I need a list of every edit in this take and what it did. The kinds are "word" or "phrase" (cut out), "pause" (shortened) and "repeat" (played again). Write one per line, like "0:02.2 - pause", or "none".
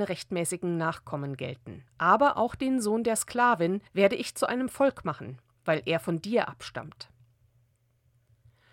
0:01.9 - pause
0:03.9 - pause